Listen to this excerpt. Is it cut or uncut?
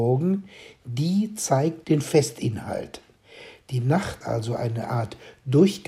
cut